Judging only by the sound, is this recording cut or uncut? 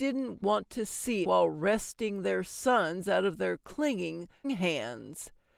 cut